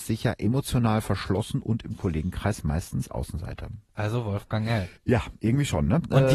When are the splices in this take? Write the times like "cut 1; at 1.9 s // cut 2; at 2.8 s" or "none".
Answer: cut 1; at 5.0 s